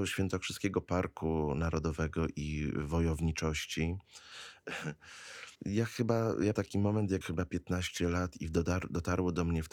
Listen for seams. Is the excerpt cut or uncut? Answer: cut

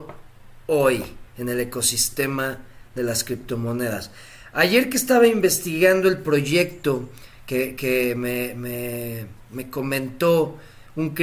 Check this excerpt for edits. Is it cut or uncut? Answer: cut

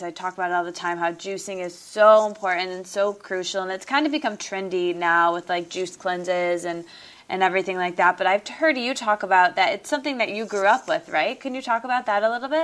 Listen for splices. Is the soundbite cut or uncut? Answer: uncut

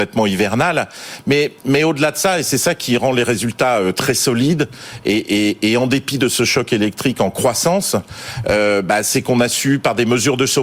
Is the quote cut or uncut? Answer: cut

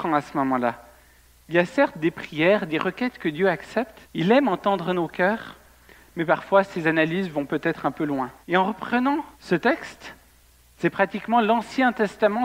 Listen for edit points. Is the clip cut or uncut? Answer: cut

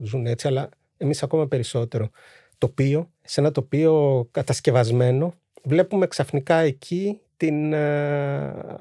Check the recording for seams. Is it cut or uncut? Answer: cut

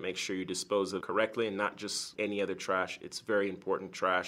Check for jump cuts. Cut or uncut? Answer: cut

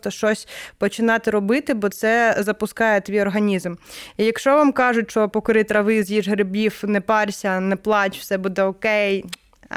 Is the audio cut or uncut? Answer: cut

